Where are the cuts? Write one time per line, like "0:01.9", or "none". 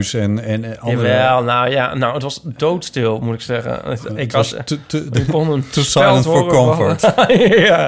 none